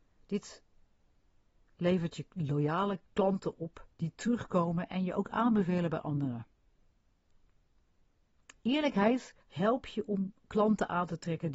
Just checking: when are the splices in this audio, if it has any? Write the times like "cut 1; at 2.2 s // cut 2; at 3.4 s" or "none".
cut 1; at 3.9 s // cut 2; at 9.4 s